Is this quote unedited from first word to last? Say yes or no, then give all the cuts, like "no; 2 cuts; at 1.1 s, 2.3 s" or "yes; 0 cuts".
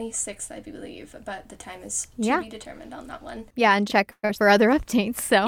no; 2 cuts; at 3.9 s, 4.3 s